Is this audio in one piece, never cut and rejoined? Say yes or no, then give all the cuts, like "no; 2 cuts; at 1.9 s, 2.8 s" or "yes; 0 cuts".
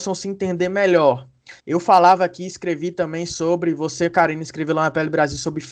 no; 1 cut; at 1.6 s